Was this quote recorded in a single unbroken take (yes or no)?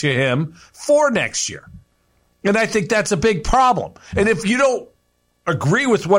yes